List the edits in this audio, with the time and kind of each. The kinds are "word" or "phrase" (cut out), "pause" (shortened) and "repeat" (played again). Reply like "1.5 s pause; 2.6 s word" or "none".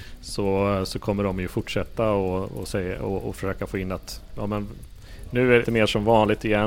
5.6 s phrase